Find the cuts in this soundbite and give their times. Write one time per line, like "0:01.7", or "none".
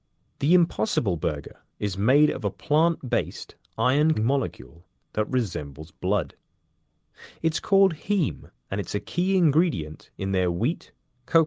0:04.1
0:08.6